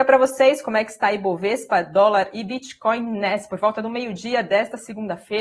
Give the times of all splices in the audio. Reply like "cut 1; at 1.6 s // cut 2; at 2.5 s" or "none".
none